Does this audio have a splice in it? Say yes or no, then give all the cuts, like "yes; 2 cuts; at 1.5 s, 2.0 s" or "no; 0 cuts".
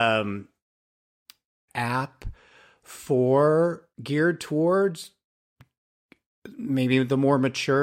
yes; 2 cuts; at 1.7 s, 3.9 s